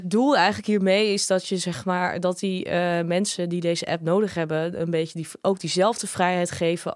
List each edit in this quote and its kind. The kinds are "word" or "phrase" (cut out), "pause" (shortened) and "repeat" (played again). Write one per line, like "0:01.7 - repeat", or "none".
none